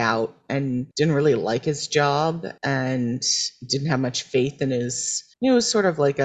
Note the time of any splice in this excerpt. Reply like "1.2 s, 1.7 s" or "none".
0.9 s, 2.6 s, 5.3 s